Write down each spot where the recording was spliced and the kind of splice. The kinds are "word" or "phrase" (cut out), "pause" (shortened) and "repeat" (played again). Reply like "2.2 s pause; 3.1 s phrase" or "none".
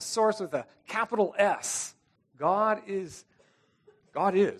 2.2 s pause